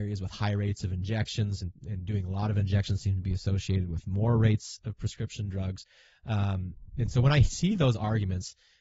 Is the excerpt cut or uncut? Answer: uncut